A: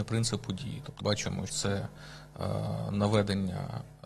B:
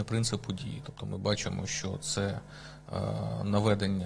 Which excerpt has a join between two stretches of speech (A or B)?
A